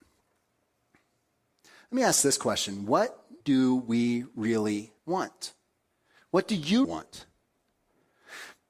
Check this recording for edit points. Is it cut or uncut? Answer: cut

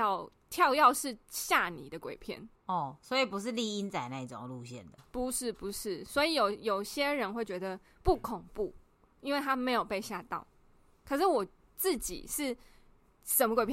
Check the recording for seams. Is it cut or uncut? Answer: uncut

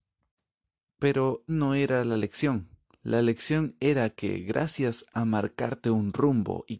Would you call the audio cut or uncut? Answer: cut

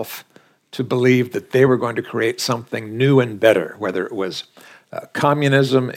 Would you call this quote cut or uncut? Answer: uncut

